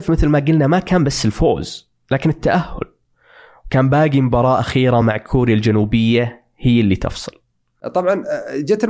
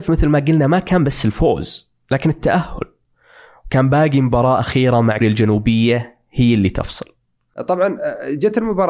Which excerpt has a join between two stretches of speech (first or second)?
second